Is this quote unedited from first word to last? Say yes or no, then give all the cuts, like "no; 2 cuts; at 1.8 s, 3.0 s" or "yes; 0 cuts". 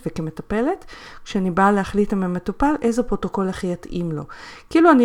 yes; 0 cuts